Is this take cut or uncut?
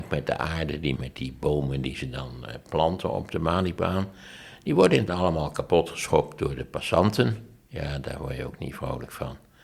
cut